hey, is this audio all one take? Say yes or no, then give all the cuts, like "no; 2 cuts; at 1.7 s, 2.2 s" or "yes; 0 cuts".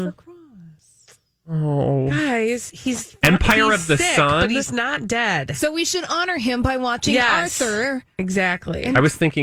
yes; 0 cuts